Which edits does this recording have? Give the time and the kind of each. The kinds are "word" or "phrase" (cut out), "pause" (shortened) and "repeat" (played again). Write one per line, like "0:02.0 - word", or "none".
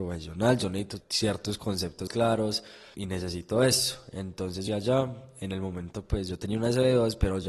0:01.0 - word
0:02.1 - word
0:02.9 - word
0:04.7 - word